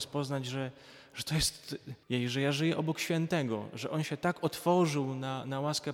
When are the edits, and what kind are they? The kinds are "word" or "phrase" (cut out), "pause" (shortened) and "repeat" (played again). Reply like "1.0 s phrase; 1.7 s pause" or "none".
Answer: 2.0 s pause